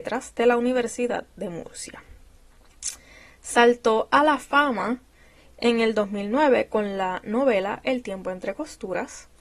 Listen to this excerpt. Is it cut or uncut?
uncut